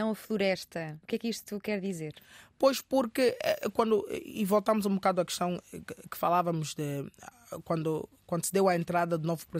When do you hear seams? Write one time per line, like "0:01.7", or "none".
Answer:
0:01.0